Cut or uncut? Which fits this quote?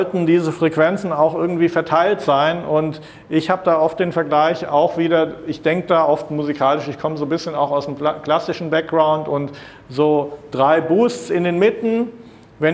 uncut